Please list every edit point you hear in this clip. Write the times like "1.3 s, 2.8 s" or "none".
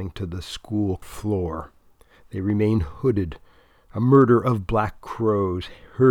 1.0 s